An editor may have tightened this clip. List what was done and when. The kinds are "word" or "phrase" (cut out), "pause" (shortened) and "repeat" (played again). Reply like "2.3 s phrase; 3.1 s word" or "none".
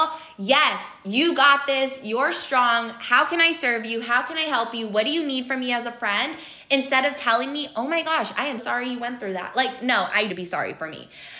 8.6 s word; 10.3 s phrase